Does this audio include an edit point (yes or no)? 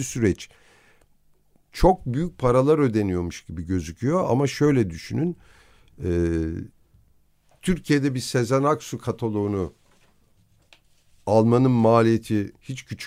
no